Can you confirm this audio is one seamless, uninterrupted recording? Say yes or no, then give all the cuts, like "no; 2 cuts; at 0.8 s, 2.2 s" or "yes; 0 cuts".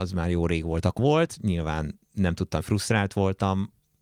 no; 2 cuts; at 1.0 s, 2.6 s